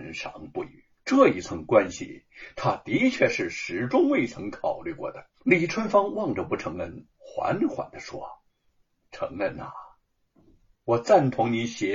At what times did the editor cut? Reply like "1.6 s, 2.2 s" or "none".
0.9 s, 5.3 s, 7.1 s, 8.5 s